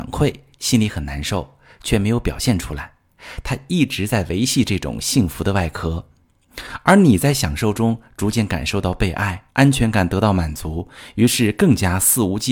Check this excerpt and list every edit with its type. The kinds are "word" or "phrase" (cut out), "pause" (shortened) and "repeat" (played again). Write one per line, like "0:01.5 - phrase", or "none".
0:09.5 - pause